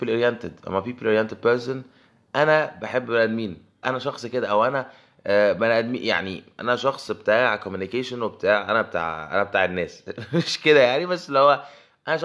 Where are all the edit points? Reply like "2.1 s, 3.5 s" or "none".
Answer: 3.8 s